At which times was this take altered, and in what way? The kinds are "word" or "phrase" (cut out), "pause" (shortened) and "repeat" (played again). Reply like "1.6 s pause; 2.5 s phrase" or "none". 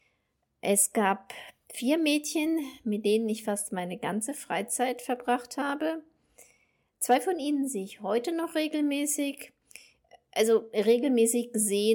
none